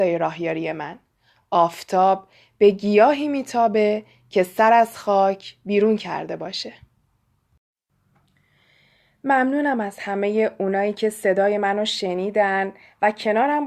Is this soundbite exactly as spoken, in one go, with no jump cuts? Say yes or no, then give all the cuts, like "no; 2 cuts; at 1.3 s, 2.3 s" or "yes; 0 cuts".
yes; 0 cuts